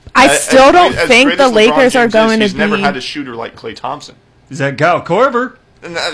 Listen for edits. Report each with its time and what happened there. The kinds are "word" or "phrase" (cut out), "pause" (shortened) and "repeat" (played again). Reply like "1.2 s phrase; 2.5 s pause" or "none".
none